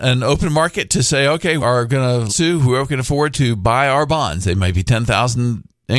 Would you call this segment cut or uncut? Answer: cut